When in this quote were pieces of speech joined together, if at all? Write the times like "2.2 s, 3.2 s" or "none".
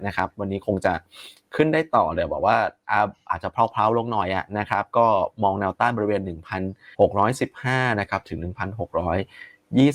6.9 s